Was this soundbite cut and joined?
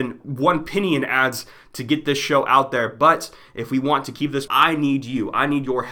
yes; 1 cut; at 4.5 s

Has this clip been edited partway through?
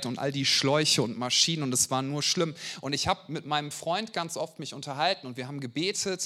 no; 0 cuts

